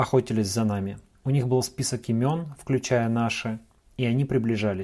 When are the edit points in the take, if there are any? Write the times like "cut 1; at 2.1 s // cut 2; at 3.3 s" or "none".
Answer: cut 1; at 1.1 s